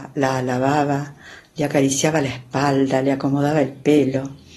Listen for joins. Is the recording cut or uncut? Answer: uncut